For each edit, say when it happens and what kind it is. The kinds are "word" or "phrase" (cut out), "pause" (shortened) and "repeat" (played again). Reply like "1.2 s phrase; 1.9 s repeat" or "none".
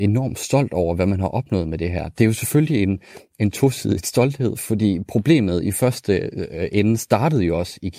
none